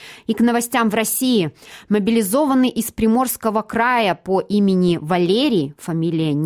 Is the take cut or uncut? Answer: uncut